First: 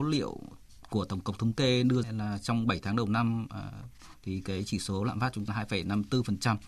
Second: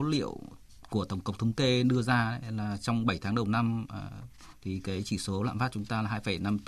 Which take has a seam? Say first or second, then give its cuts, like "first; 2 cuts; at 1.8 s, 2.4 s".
first; 2 cuts; at 2.0 s, 5.5 s